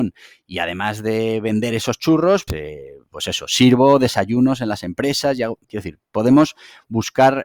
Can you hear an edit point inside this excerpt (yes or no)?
yes